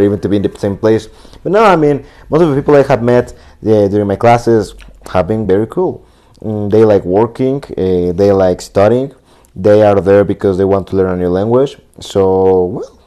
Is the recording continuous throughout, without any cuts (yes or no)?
yes